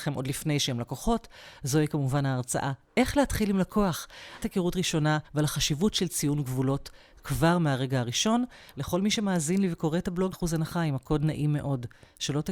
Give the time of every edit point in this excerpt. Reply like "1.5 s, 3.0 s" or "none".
4.4 s, 5.3 s, 10.3 s